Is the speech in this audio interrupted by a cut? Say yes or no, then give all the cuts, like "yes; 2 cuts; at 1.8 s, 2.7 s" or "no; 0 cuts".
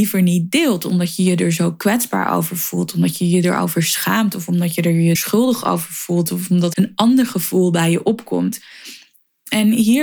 yes; 2 cuts; at 5.1 s, 6.7 s